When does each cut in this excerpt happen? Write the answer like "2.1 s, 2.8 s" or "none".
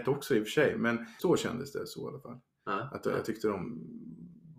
1.2 s